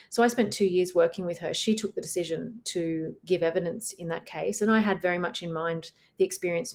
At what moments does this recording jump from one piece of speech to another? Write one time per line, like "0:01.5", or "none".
none